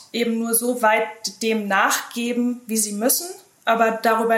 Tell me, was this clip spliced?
no; 0 cuts

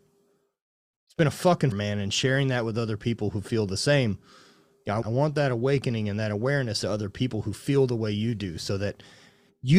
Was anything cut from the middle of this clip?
yes; 3 cuts; at 1.7 s, 5.0 s, 6.8 s

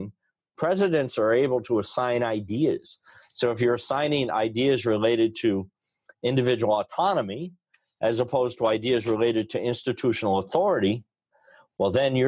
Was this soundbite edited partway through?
no; 0 cuts

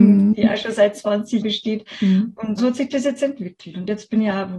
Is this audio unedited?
no; 2 cuts; at 1.4 s, 2.6 s

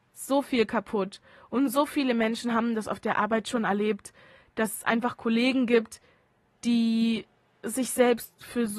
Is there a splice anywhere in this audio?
no; 0 cuts

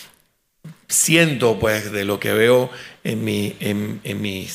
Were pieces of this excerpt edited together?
no; 0 cuts

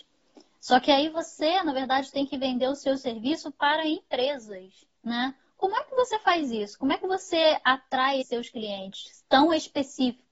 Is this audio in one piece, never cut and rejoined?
no; 2 cuts; at 4.9 s, 8.2 s

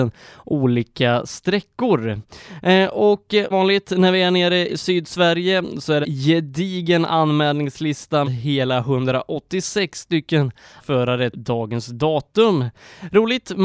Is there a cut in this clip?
yes; 6 cuts; at 3.5 s, 4.7 s, 6.0 s, 8.2 s, 10.8 s, 11.3 s

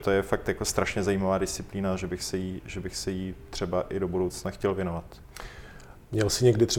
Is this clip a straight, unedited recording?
yes; 0 cuts

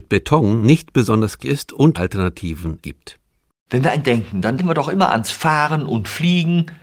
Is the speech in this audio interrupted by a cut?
yes; 5 cuts; at 1.4 s, 1.9 s, 2.8 s, 4.0 s, 4.6 s

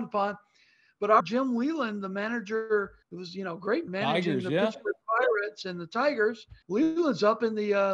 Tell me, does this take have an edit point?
yes; 4 cuts; at 1.2 s, 3.0 s, 3.9 s, 6.6 s

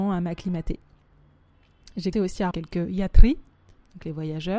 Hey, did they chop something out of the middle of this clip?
yes; 2 cuts; at 2.1 s, 2.5 s

